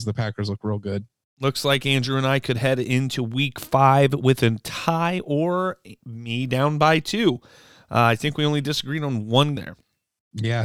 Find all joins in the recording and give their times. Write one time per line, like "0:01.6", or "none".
0:09.6